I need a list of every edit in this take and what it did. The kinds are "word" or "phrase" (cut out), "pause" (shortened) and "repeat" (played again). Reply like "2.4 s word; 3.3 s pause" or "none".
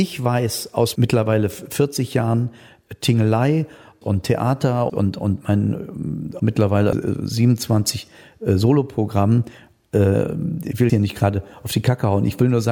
1.0 s word; 4.0 s word; 4.9 s word; 6.4 s word; 6.9 s word; 10.9 s word